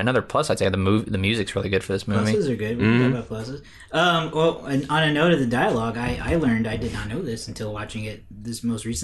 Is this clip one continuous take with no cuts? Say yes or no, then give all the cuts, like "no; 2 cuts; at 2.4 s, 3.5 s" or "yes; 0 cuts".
yes; 0 cuts